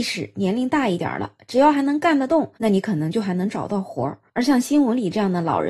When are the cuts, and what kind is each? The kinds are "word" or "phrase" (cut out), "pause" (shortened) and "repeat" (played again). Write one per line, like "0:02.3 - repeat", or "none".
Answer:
0:02.6 - pause
0:04.3 - pause